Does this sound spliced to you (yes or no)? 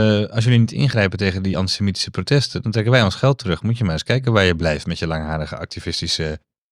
no